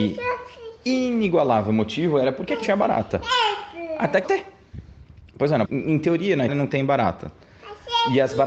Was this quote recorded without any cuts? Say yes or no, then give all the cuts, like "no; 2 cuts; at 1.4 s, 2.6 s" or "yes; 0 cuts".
no; 4 cuts; at 2.6 s, 4.2 s, 5.6 s, 6.5 s